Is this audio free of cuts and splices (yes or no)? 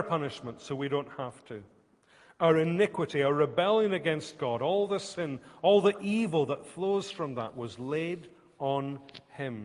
yes